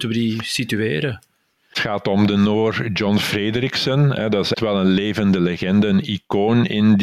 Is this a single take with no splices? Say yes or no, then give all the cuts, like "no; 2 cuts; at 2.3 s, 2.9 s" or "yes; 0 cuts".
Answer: no; 1 cut; at 4.5 s